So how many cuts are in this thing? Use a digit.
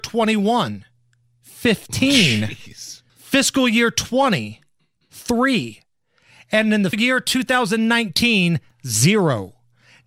2